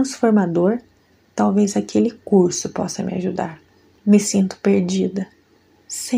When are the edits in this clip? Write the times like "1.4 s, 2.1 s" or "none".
none